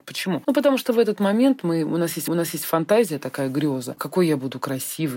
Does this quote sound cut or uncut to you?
cut